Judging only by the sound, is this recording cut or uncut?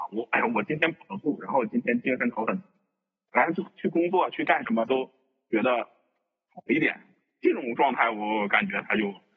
uncut